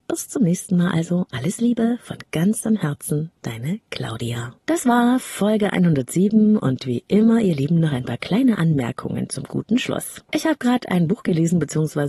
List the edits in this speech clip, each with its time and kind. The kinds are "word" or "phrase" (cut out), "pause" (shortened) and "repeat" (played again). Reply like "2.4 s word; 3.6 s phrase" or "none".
4.6 s pause; 10.2 s pause